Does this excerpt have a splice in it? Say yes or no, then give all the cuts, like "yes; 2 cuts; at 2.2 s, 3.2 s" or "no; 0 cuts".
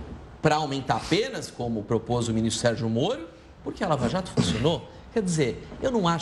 no; 0 cuts